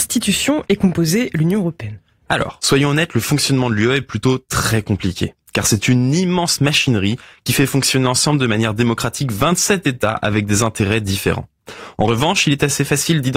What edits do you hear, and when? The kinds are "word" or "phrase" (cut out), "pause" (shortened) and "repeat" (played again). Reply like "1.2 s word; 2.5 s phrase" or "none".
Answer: none